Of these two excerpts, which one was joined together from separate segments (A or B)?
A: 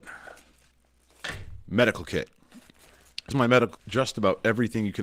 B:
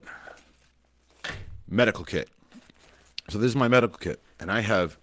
A